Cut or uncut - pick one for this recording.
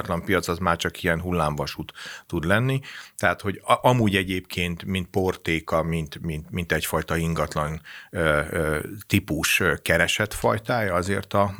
uncut